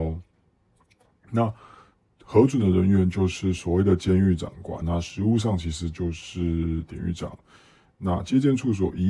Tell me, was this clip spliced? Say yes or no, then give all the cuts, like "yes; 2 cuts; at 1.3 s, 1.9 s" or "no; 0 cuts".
yes; 1 cut; at 4.8 s